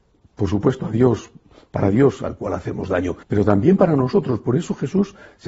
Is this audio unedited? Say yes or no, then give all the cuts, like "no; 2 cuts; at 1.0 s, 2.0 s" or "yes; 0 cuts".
no; 1 cut; at 3.2 s